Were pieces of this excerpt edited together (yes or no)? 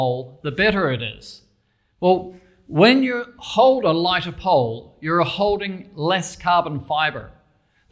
no